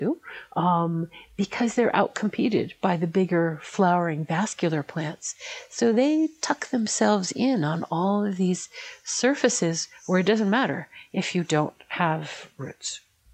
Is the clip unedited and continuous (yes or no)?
yes